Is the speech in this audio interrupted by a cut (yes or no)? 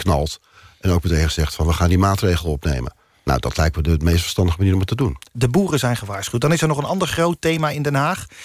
no